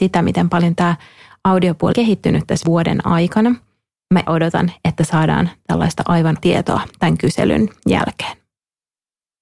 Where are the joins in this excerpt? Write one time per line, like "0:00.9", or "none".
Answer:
0:01.9
0:02.6
0:04.3
0:06.4